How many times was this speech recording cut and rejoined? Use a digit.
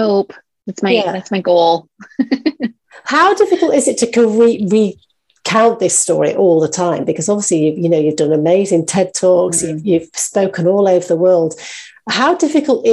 0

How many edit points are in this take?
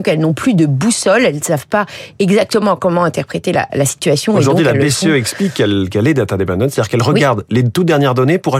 1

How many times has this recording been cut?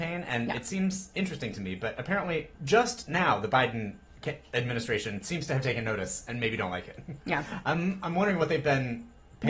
2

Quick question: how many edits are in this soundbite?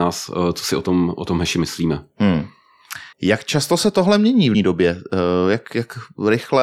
3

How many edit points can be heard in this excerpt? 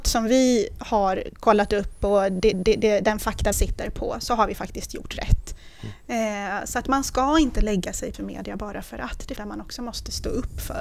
4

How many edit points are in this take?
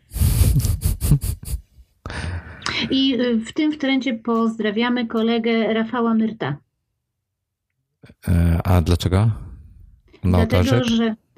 0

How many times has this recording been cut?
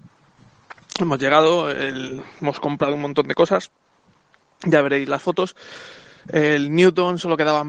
0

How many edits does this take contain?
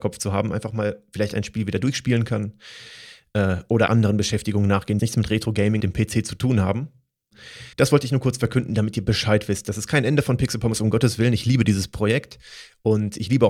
4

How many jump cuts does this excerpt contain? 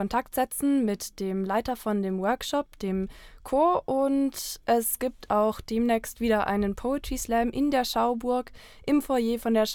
0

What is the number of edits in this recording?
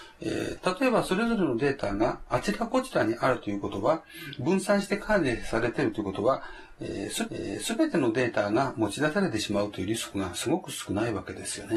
1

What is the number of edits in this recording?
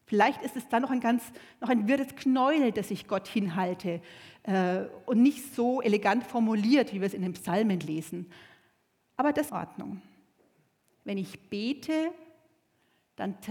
1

